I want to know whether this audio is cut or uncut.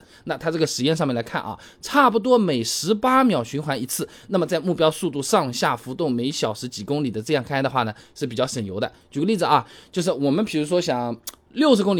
uncut